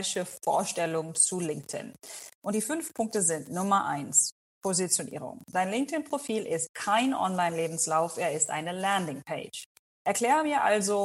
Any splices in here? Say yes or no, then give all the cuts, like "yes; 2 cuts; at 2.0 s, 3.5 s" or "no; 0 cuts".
no; 0 cuts